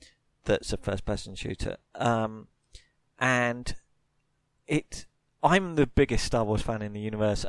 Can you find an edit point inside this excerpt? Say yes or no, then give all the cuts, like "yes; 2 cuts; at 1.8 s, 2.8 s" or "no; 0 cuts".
no; 0 cuts